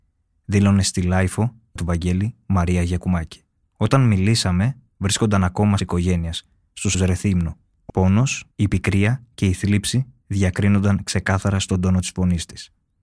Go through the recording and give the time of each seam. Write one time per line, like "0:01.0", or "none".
0:01.8
0:03.6
0:05.8
0:06.9
0:07.9
0:08.5